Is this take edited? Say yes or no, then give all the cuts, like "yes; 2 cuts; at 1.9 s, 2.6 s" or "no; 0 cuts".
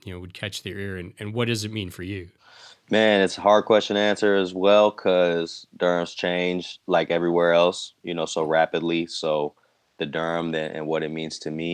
no; 0 cuts